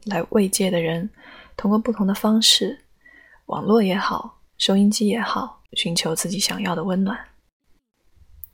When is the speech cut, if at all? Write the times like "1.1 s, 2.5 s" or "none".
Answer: 5.7 s